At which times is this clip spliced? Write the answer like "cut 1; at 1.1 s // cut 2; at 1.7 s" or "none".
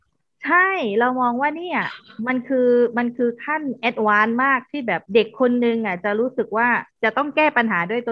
cut 1; at 5.1 s // cut 2; at 6.9 s